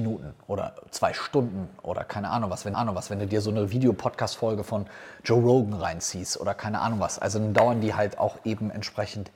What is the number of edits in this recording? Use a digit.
1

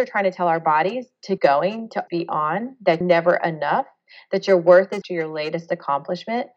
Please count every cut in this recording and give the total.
4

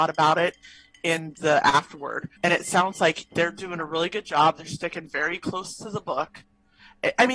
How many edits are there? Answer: 1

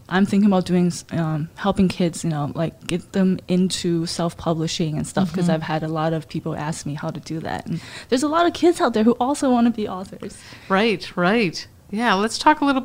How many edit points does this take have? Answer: 1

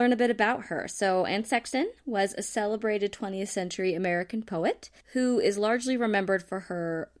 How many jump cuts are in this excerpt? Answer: 1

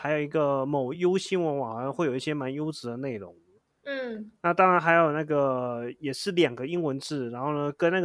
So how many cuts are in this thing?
0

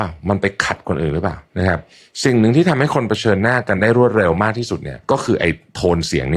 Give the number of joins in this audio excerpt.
2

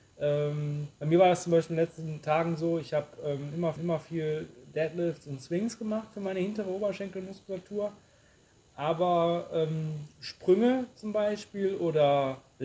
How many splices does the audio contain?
1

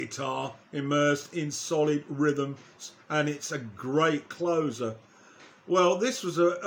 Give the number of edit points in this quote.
0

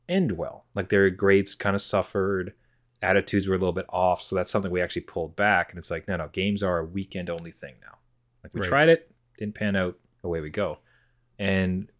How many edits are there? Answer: 0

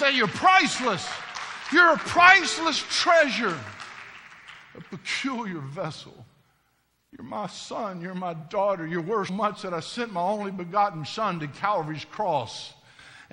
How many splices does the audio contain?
1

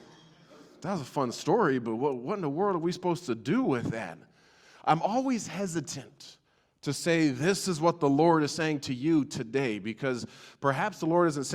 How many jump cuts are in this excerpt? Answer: 0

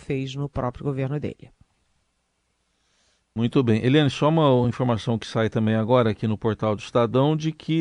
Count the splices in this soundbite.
0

